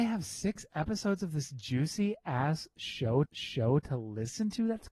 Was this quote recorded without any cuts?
no; 1 cut; at 3.3 s

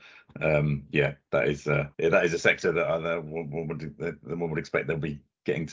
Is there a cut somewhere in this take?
yes; 1 cut; at 1.9 s

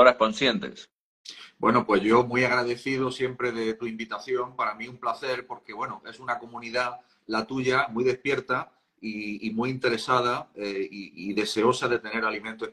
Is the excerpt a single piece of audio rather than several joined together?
yes; 0 cuts

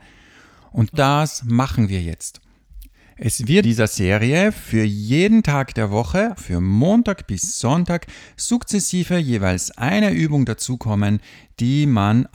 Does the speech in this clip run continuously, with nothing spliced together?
no; 3 cuts; at 0.9 s, 3.6 s, 6.4 s

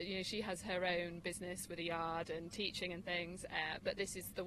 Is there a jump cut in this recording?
no; 0 cuts

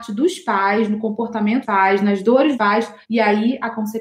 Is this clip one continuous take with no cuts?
no; 3 cuts; at 1.6 s, 2.5 s, 3.0 s

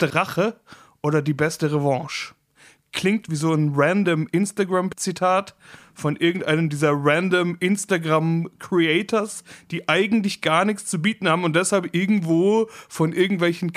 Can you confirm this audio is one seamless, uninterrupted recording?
yes; 0 cuts

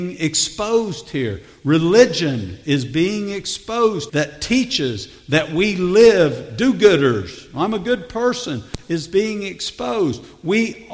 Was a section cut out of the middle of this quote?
yes; 1 cut; at 4.1 s

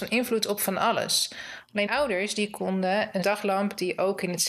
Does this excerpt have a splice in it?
yes; 2 cuts; at 1.9 s, 3.2 s

